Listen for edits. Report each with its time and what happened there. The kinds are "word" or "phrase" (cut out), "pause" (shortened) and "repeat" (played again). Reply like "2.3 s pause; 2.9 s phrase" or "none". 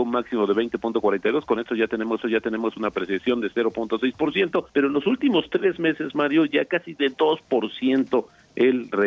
2.2 s repeat; 4.7 s pause